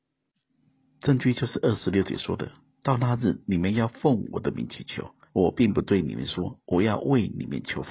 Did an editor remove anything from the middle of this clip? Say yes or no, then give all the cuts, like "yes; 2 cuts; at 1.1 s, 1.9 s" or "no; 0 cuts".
yes; 1 cut; at 5.3 s